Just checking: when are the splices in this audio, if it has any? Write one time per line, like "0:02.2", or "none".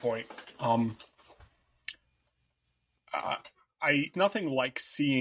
0:04.1